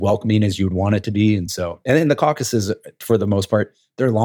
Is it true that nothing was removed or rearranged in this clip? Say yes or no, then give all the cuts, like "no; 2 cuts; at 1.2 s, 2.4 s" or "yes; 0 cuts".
yes; 0 cuts